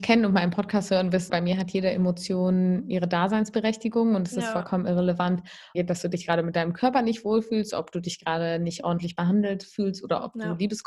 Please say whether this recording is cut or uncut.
cut